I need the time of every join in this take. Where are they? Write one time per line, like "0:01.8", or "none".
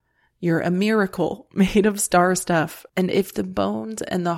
0:02.9